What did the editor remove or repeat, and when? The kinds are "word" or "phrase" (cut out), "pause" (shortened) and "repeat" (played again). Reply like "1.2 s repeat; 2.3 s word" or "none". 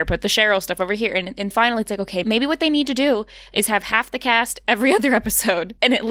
1.5 s word; 2.2 s word